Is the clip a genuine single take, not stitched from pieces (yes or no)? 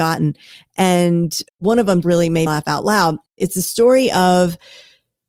no